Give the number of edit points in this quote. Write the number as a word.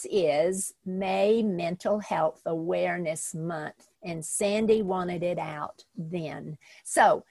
one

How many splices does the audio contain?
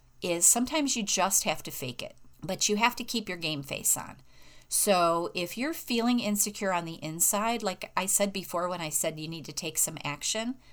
one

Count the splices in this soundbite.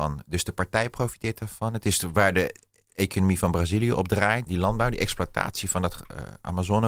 one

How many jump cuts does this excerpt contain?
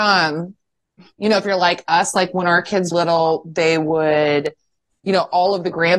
one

